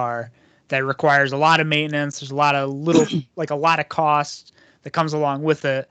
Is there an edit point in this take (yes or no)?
no